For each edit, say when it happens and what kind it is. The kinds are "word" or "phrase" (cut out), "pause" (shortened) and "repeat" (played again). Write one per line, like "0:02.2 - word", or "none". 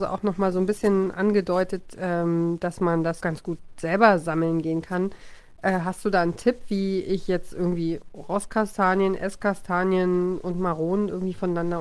0:03.2 - word